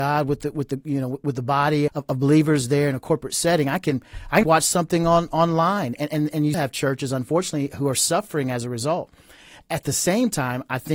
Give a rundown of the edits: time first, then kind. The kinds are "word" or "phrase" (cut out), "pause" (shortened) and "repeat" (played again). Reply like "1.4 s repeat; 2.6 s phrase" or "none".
1.9 s word; 4.4 s word; 6.5 s word